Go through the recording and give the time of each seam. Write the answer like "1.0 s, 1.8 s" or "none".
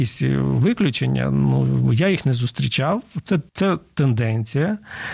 3.5 s